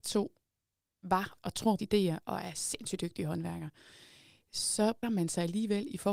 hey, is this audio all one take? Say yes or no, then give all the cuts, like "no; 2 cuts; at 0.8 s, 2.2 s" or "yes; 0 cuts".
no; 3 cuts; at 1.4 s, 1.8 s, 5.0 s